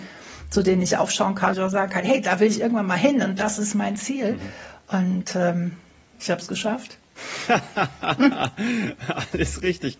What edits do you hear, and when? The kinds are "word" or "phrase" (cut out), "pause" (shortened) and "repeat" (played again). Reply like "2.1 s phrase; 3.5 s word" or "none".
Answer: 1.5 s word; 6.1 s word